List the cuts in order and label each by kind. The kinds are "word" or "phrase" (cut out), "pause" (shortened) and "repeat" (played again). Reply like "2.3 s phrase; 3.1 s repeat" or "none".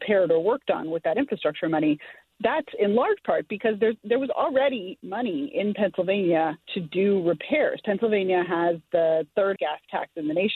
6.6 s pause; 9.6 s word